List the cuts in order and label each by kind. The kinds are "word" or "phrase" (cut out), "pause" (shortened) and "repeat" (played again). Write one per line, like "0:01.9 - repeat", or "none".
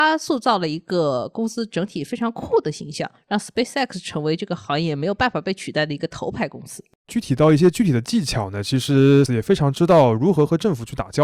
0:09.3 - word